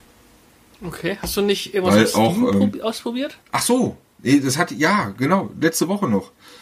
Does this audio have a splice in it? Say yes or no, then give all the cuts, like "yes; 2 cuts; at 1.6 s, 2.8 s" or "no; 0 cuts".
yes; 1 cut; at 3.4 s